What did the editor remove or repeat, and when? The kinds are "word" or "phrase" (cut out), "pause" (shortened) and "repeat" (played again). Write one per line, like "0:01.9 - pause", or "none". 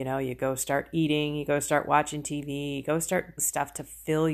0:03.4 - word